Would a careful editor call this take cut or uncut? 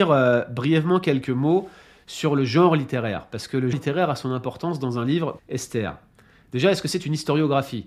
cut